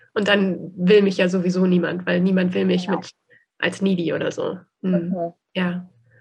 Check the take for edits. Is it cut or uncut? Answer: uncut